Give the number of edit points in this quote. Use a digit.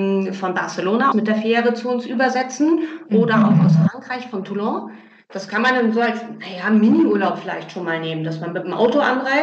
1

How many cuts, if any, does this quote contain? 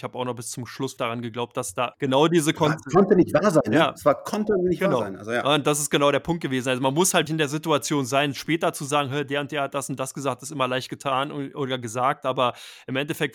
3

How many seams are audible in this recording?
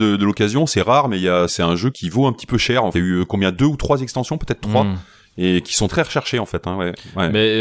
4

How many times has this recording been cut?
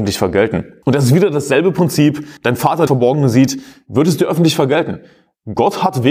2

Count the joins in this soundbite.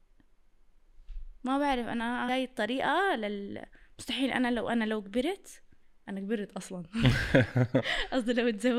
2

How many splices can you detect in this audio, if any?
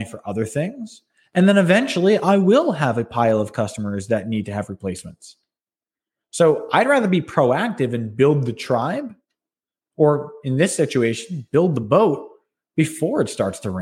0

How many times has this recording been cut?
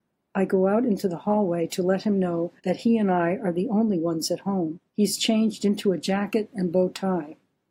2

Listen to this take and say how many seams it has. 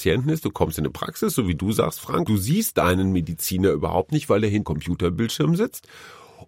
2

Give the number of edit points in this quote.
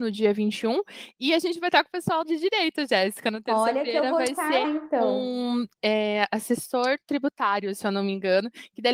3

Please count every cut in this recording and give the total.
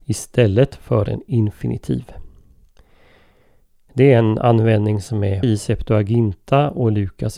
1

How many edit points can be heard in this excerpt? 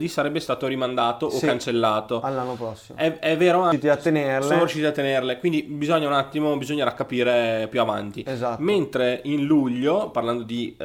0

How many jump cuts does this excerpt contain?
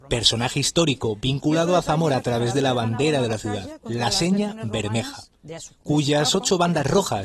0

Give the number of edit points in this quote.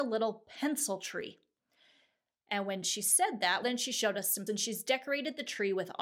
2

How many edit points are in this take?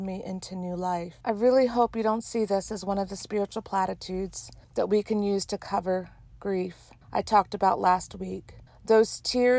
4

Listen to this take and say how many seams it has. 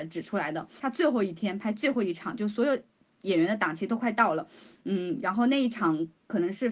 0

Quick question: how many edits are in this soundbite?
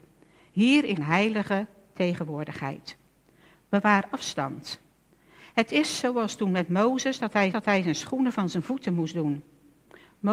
2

